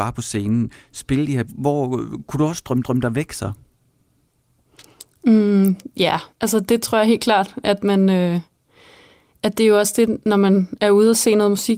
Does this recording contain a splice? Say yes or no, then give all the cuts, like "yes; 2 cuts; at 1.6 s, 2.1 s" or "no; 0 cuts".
yes; 3 cuts; at 1.5 s, 2.8 s, 6.3 s